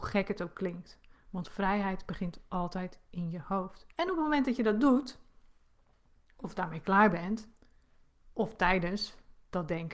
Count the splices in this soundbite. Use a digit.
1